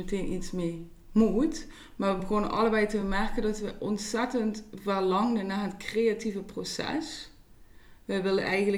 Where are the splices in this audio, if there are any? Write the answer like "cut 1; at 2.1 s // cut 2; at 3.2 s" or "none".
none